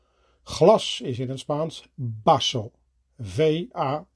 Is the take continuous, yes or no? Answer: yes